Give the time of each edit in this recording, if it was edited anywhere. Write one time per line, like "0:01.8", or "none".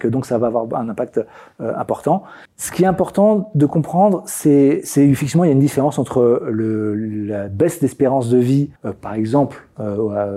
0:02.5
0:08.8